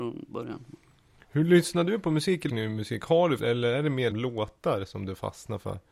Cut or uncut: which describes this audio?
cut